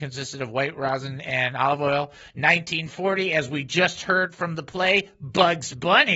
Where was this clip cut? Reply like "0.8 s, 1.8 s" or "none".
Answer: none